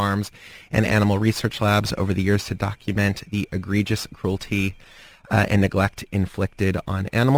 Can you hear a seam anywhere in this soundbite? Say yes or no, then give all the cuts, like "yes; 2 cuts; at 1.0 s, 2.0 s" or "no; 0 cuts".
no; 0 cuts